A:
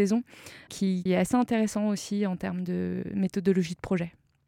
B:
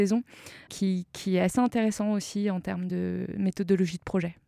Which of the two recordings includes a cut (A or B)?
A